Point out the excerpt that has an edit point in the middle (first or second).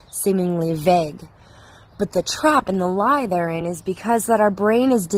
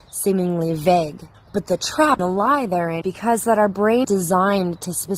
second